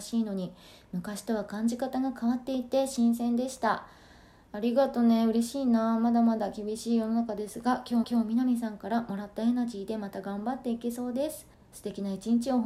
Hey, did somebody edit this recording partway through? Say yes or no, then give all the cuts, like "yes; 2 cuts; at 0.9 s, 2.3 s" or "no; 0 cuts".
yes; 2 cuts; at 8.0 s, 11.5 s